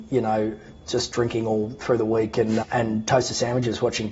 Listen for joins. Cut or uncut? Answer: cut